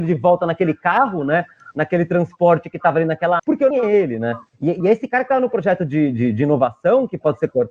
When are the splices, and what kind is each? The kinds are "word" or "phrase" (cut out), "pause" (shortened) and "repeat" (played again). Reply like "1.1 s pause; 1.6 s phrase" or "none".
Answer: 3.4 s word; 3.7 s phrase; 4.5 s pause; 4.8 s phrase